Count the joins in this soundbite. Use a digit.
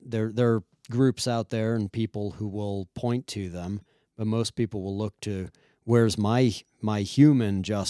0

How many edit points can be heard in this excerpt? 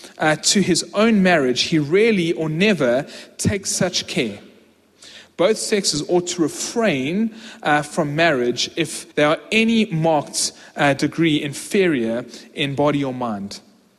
1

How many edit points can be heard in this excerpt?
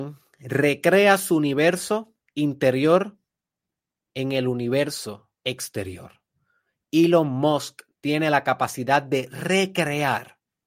2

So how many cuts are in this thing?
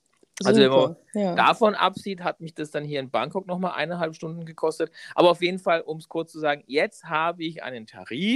0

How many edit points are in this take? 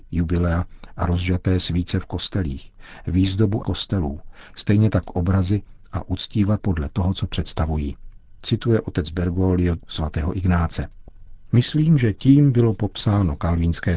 2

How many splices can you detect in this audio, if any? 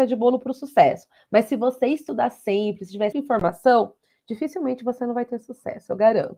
1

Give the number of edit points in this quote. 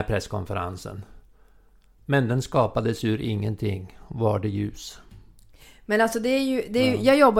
0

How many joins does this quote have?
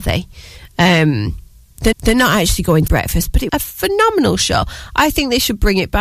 3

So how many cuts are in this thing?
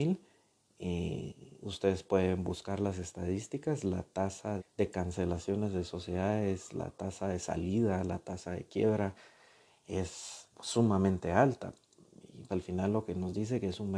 3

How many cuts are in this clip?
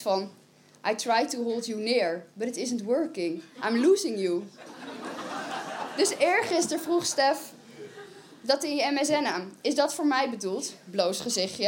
0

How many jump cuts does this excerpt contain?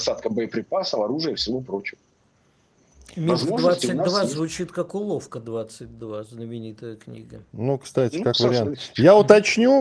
0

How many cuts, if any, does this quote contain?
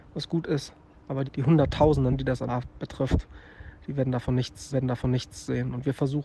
5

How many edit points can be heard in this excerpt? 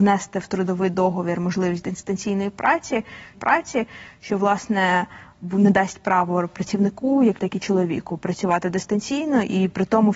2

